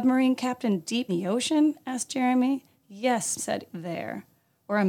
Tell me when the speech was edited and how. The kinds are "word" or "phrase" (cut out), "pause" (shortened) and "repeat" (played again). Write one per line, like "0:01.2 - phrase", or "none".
0:01.1 - word
0:03.4 - word
0:03.7 - word